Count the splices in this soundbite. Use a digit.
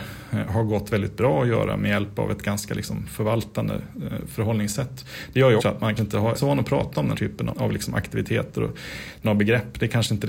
6